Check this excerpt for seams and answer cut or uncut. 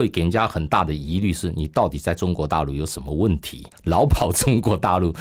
cut